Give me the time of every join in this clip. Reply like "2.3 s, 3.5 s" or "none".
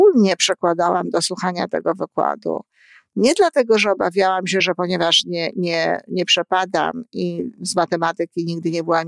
none